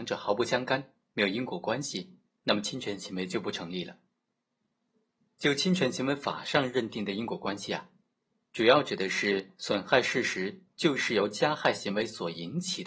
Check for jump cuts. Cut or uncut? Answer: uncut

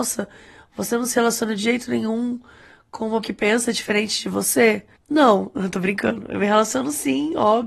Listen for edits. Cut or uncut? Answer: cut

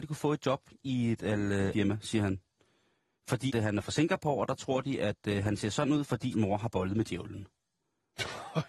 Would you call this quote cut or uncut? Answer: cut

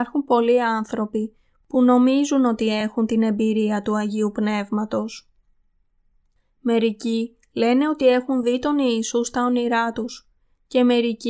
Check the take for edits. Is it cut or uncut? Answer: uncut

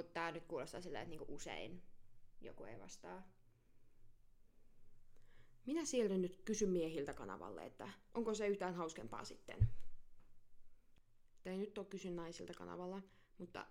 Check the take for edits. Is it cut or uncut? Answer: uncut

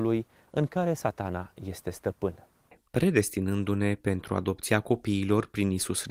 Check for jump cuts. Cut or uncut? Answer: uncut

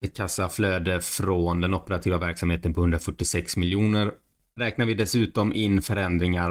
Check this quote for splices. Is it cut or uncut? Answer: uncut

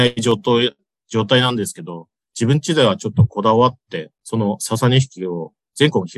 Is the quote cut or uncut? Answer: cut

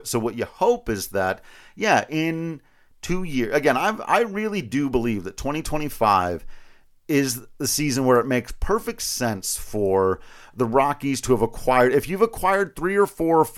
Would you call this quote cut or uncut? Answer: uncut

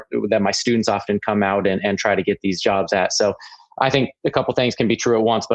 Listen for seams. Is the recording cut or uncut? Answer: uncut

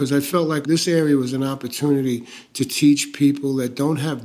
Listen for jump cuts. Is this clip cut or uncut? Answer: uncut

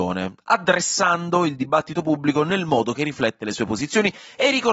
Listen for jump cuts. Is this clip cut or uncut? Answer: uncut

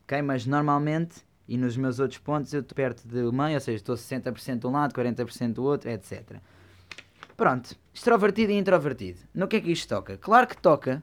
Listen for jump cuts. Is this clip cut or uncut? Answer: cut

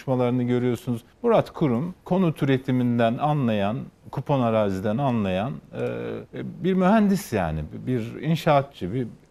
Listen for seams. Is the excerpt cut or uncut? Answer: cut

